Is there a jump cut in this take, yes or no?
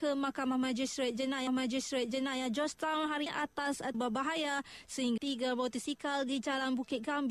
yes